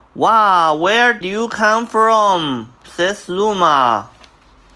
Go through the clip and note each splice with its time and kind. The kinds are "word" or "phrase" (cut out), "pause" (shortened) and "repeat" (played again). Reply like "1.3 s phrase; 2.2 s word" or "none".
1.2 s word